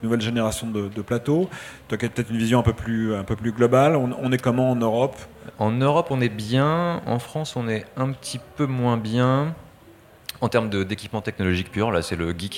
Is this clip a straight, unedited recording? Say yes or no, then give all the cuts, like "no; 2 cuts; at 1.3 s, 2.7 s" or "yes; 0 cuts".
no; 1 cut; at 5.5 s